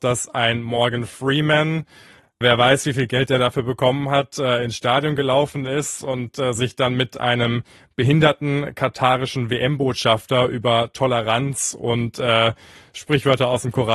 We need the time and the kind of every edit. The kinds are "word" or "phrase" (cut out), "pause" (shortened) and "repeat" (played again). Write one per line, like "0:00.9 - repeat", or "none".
none